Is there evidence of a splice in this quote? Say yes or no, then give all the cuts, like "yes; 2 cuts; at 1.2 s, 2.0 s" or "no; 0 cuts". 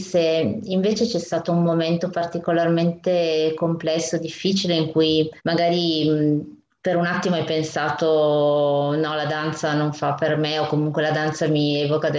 yes; 1 cut; at 5.4 s